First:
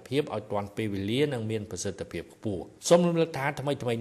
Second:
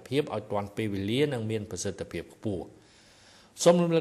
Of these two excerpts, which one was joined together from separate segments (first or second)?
first